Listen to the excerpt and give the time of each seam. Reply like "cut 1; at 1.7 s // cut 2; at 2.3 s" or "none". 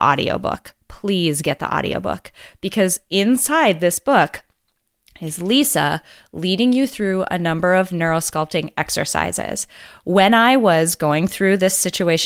cut 1; at 3.1 s